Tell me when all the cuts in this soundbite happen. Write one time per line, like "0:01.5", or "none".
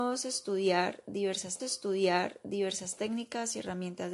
0:01.6